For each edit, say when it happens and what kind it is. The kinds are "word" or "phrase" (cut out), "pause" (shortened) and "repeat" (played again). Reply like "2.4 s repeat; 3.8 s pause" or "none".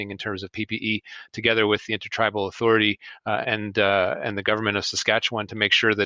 3.4 s word